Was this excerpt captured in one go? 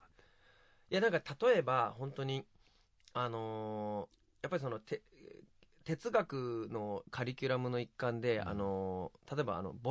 yes; 0 cuts

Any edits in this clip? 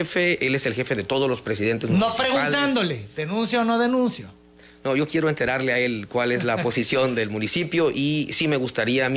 no; 0 cuts

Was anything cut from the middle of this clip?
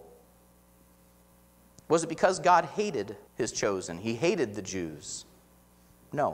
yes; 1 cut; at 3.3 s

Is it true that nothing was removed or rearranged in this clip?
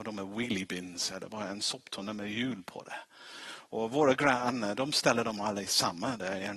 yes; 0 cuts

